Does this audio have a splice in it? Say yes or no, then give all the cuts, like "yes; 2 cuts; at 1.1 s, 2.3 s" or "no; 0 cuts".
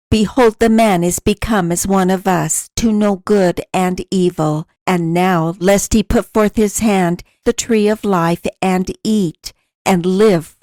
yes; 2 cuts; at 4.8 s, 7.4 s